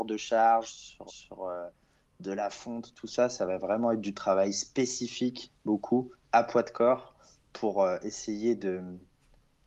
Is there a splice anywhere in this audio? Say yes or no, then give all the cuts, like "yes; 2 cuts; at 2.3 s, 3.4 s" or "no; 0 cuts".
yes; 1 cut; at 1.1 s